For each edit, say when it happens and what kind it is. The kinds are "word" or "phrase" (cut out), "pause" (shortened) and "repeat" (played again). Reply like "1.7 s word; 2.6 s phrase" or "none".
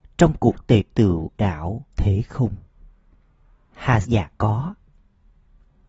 1.4 s word; 1.9 s word; 4.0 s word